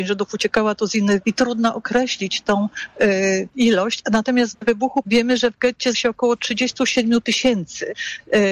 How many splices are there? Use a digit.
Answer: 5